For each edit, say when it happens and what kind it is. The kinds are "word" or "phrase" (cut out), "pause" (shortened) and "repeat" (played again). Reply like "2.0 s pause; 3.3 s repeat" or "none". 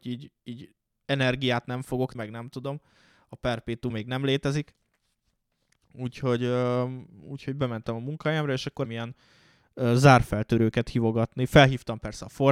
2.1 s word; 3.9 s word; 8.8 s word

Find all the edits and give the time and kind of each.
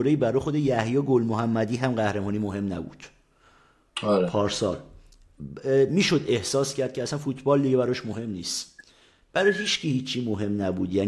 none

